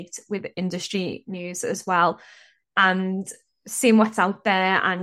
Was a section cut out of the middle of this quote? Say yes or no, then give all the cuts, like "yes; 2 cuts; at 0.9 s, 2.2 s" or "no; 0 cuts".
no; 0 cuts